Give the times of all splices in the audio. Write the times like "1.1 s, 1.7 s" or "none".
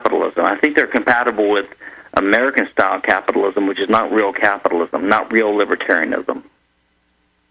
none